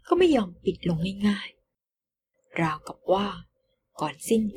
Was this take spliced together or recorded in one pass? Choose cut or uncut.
uncut